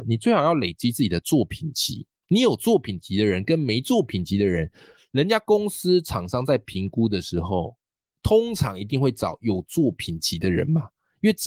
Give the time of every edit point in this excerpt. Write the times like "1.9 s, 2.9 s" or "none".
2.2 s